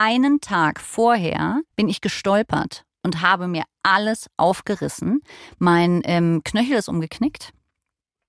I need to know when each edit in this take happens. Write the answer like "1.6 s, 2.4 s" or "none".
1.7 s